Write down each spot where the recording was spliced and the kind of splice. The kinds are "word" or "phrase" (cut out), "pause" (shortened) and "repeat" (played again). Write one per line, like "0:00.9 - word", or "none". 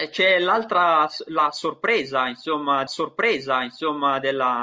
0:02.9 - repeat